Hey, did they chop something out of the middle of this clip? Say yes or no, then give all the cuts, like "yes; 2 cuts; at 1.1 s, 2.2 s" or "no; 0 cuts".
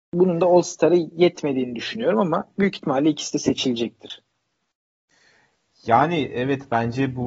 no; 0 cuts